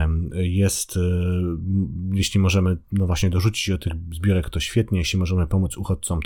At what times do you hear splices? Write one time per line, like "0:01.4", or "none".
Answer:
none